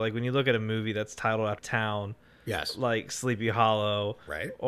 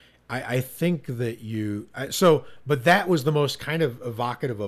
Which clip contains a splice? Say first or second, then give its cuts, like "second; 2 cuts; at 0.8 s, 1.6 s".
first; 1 cut; at 1.6 s